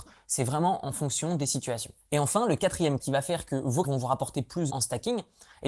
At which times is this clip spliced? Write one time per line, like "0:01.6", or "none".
0:03.0
0:03.8
0:04.7